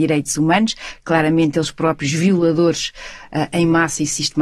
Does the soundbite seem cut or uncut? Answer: uncut